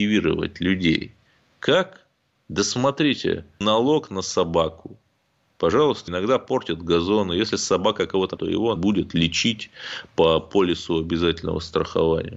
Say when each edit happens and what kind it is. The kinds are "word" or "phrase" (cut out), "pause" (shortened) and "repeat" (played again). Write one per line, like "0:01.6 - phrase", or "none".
0:03.6 - word
0:06.1 - word
0:08.4 - word
0:08.8 - word